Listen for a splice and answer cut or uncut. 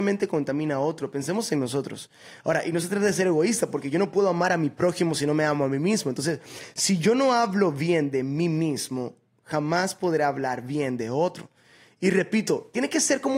uncut